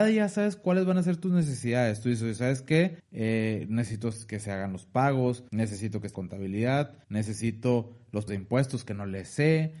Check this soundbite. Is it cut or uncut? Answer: cut